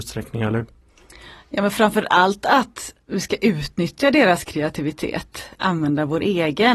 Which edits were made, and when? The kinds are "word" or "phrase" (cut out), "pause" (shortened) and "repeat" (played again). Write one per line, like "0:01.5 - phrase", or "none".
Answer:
0:05.6 - word